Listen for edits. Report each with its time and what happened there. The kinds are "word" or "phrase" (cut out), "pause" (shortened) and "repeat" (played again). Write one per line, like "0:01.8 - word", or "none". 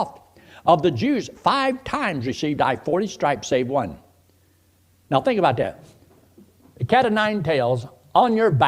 none